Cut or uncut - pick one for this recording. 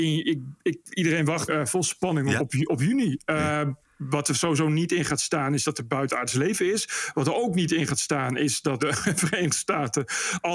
cut